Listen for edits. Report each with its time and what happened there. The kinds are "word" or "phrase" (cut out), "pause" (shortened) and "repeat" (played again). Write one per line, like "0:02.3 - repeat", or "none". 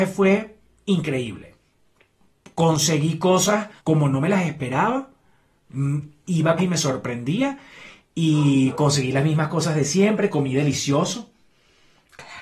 0:03.8 - pause
0:06.6 - phrase

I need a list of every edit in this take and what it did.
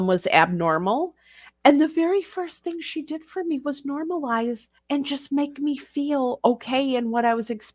0:04.8 - pause

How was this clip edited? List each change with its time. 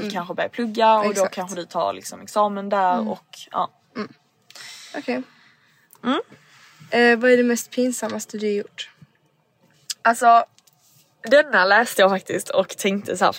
none

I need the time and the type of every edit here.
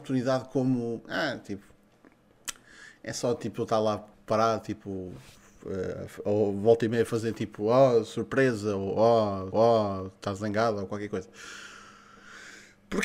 0:04.1 - pause
0:09.5 - repeat

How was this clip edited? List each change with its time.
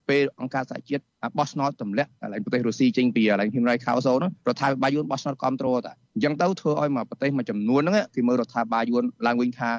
0:04.4 - pause

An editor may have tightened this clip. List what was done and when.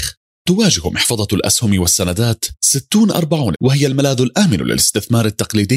0:03.5 - word

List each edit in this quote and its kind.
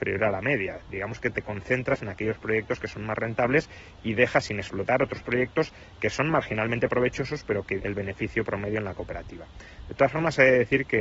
0:07.8 - word

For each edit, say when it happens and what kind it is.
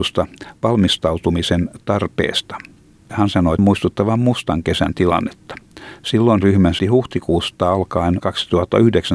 0:03.6 - word
0:06.4 - word
0:06.8 - word
0:08.2 - word

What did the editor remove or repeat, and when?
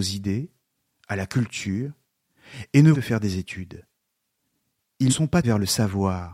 0:02.9 - phrase
0:05.1 - word
0:05.4 - word

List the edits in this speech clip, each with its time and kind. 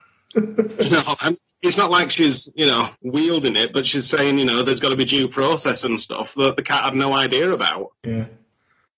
0:03.0 - pause
0:08.0 - pause

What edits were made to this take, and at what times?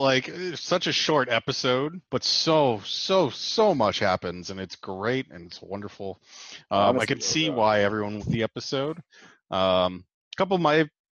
0:02.1 - pause
0:08.2 - phrase

